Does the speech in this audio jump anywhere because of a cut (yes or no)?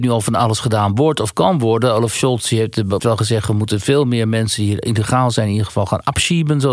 yes